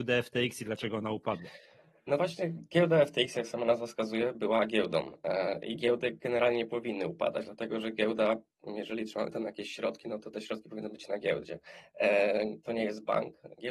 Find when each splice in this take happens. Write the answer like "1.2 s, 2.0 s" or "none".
none